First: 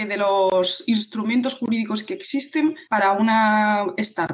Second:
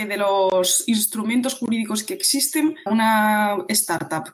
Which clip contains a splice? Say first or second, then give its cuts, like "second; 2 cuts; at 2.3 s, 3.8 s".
second; 1 cut; at 2.9 s